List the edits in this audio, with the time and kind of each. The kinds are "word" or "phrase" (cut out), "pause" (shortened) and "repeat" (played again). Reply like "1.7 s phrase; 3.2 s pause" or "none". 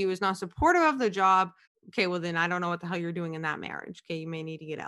1.6 s pause